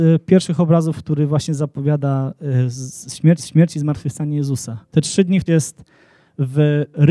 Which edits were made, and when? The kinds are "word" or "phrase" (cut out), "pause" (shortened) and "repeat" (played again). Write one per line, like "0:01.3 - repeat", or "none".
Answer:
0:03.4 - repeat
0:04.9 - pause
0:05.5 - phrase